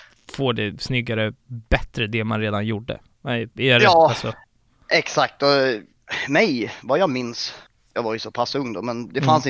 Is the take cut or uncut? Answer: uncut